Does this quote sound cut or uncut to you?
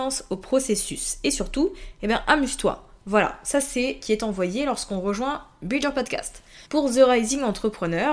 cut